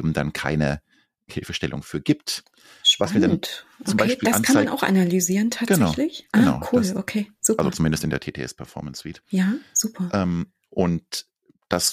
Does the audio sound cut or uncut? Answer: uncut